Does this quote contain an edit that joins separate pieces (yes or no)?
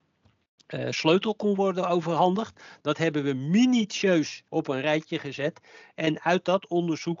yes